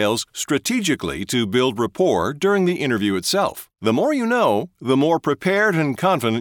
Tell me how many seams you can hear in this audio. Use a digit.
1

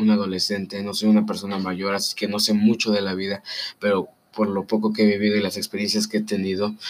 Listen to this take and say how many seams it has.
0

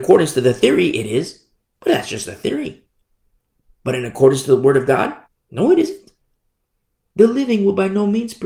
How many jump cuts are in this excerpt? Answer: 1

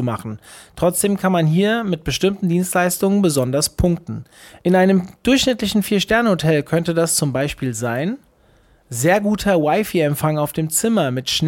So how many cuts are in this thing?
0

